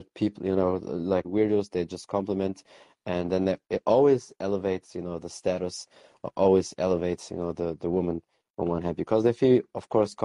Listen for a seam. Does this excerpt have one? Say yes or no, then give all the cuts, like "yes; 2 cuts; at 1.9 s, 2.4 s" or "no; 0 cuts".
yes; 1 cut; at 1.2 s